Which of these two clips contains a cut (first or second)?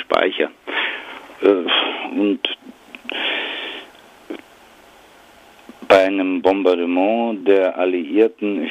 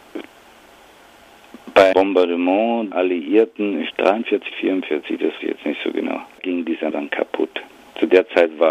second